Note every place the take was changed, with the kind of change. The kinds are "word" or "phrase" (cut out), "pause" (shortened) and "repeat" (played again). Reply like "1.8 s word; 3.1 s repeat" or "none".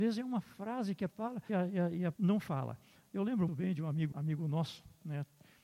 1.1 s word; 1.5 s word; 2.1 s word; 3.5 s word; 4.1 s word

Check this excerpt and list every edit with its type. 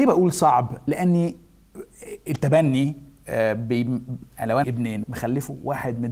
4.6 s word; 5.0 s word

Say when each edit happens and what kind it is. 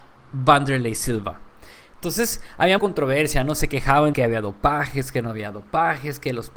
2.8 s word; 4.1 s word

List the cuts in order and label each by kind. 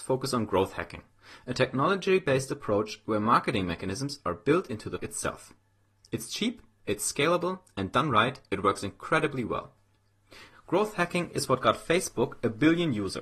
5.0 s word

